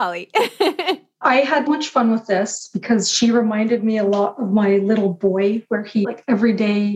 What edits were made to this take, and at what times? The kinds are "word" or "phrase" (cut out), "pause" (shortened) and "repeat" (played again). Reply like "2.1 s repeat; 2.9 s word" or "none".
1.7 s word